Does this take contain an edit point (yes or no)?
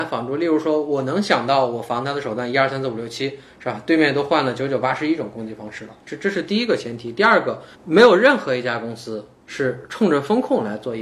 yes